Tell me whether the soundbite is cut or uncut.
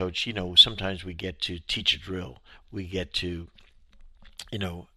uncut